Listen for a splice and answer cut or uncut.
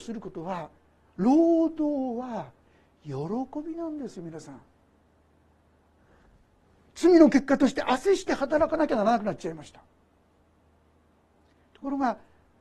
uncut